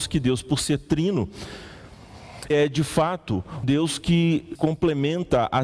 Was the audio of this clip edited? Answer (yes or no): yes